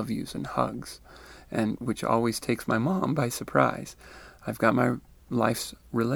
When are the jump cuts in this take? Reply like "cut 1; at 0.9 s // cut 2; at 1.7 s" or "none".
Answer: none